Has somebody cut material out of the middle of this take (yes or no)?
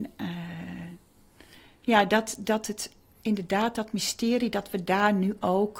no